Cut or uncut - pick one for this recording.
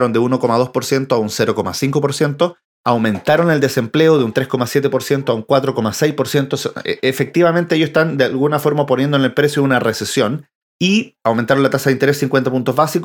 uncut